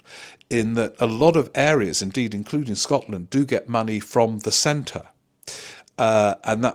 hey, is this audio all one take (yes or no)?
yes